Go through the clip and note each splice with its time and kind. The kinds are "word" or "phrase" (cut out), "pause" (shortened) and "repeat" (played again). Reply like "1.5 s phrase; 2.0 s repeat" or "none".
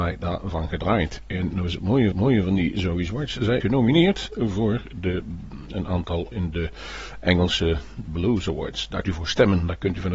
2.1 s repeat; 3.6 s word; 6.3 s word; 9.0 s word